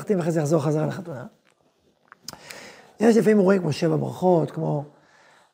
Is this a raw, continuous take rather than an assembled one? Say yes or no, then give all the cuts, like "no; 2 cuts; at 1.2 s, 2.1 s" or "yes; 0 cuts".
yes; 0 cuts